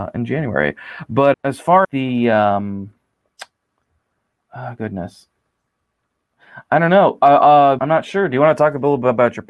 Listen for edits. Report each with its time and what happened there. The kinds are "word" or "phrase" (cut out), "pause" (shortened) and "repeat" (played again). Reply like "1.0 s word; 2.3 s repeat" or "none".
1.3 s word; 1.8 s word; 7.8 s word